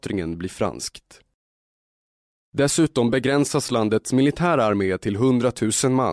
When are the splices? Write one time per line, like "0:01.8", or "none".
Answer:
none